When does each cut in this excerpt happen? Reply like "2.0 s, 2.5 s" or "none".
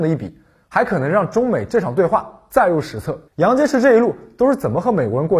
3.3 s